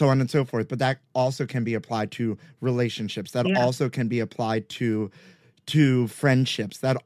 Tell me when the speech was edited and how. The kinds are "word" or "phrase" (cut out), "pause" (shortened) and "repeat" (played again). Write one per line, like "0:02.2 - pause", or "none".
none